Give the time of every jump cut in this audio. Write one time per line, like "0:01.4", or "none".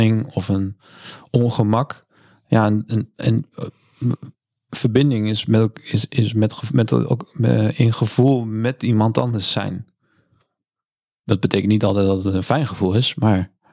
none